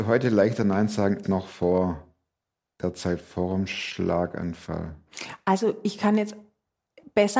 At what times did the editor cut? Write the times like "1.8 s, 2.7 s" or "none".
1.2 s